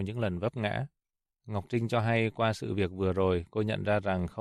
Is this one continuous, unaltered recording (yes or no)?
yes